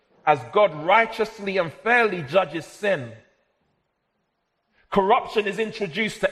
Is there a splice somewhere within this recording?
no; 0 cuts

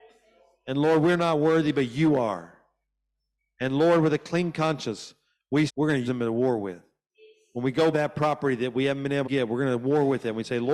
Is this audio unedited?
no; 4 cuts; at 5.7 s, 6.0 s, 7.9 s, 9.2 s

